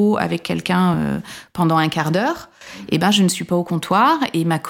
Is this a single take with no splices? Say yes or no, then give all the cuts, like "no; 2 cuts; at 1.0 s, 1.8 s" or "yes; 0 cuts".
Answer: yes; 0 cuts